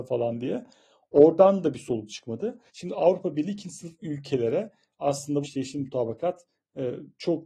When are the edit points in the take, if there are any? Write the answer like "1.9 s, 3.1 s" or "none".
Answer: 2.7 s, 5.4 s